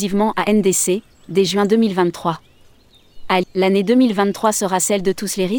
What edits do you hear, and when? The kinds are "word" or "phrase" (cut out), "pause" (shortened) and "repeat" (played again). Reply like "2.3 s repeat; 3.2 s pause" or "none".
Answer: 3.4 s phrase